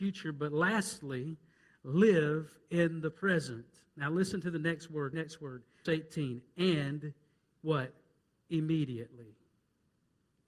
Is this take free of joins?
no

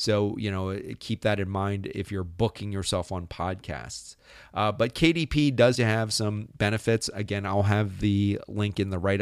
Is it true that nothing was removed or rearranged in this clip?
no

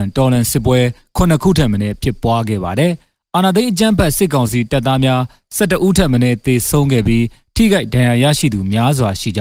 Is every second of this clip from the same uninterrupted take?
yes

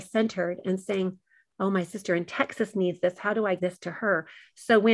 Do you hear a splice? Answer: yes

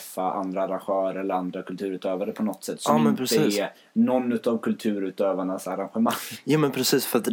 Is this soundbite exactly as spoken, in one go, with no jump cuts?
yes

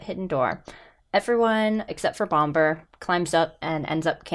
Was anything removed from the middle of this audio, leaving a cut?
yes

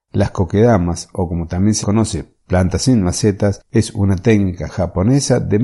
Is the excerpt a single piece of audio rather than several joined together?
no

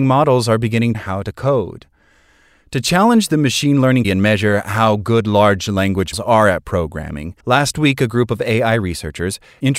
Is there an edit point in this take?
yes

